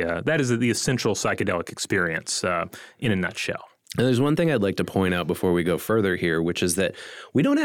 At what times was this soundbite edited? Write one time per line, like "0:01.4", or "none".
none